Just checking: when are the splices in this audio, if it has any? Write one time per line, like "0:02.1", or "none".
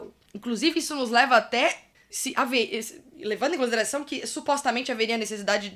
0:01.9